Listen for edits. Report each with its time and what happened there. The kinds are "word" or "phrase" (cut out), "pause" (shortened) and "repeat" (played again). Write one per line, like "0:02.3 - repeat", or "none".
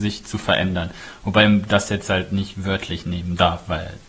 none

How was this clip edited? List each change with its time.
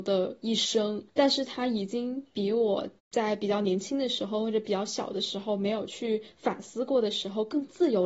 0:01.1 - pause
0:03.0 - pause

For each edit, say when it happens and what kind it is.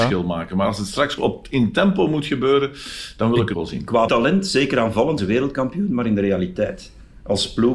0:01.2 - word
0:03.5 - word
0:04.1 - word
0:05.2 - word

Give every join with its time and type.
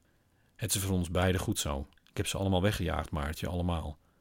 0:02.0 - pause

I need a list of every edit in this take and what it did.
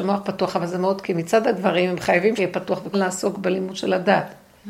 0:01.0 - word
0:02.4 - word
0:02.9 - word

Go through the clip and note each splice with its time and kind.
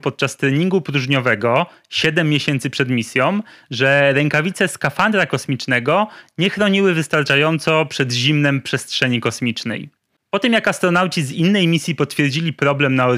none

